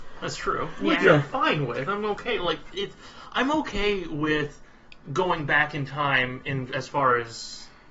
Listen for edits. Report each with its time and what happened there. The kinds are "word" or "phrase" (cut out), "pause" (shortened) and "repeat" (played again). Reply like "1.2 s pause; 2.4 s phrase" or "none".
5.0 s pause